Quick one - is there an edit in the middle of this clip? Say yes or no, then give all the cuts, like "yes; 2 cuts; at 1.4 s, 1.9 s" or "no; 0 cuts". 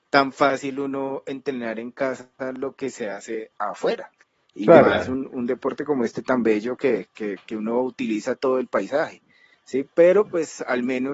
no; 0 cuts